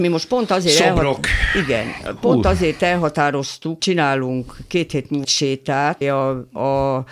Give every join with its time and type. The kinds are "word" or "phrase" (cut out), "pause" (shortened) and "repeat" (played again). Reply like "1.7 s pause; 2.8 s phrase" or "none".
3.8 s word; 5.2 s word; 6.0 s word